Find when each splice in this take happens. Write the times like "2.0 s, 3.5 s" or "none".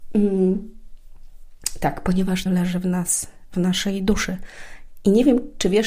2.5 s